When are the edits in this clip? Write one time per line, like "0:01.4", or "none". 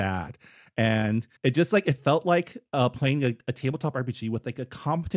0:01.4